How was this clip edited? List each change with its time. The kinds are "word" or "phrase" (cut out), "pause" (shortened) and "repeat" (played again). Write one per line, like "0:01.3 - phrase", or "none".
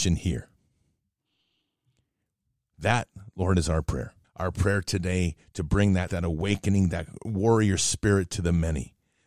0:04.2 - pause
0:06.1 - word